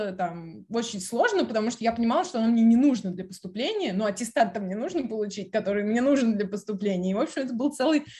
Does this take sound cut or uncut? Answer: uncut